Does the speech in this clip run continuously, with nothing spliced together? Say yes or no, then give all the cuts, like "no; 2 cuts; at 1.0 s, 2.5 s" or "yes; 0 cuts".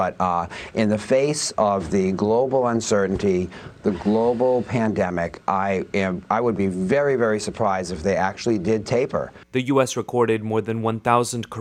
yes; 0 cuts